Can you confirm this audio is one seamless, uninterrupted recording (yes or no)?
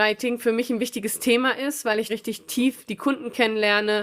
no